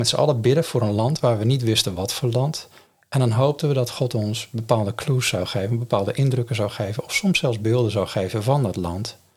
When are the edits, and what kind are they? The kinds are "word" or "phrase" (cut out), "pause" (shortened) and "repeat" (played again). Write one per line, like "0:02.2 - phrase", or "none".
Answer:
none